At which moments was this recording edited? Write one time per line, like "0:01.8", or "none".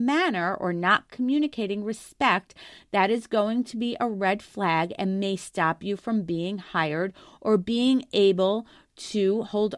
none